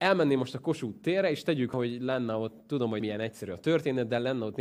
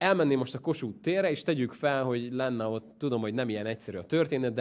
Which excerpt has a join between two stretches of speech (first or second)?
first